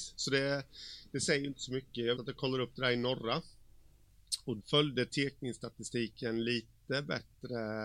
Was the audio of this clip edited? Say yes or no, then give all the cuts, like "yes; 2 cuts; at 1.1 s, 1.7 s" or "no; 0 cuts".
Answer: yes; 2 cuts; at 2.2 s, 4.6 s